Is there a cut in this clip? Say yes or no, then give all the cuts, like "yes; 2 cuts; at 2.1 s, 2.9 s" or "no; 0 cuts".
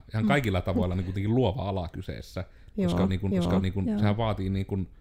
yes; 1 cut; at 3.3 s